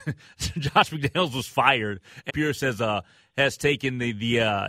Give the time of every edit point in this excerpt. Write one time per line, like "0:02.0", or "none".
0:02.3